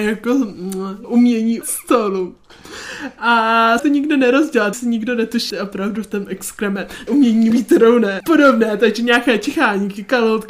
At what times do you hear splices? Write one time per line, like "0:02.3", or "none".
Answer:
0:01.0
0:01.6
0:03.8
0:04.7
0:05.5
0:07.1
0:07.5
0:08.2